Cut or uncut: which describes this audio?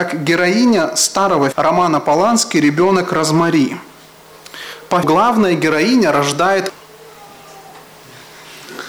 cut